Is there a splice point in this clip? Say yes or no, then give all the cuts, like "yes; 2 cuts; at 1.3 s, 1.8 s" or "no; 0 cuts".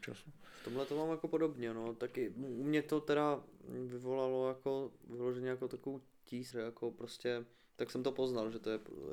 yes; 1 cut; at 6.5 s